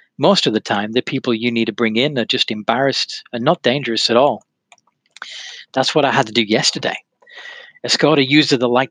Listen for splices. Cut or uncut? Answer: uncut